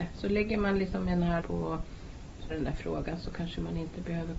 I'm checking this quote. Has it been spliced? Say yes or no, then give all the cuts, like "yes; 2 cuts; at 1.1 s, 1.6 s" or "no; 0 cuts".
yes; 2 cuts; at 1.4 s, 2.5 s